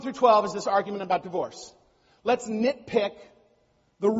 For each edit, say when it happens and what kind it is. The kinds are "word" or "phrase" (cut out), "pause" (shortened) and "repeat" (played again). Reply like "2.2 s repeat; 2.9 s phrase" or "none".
none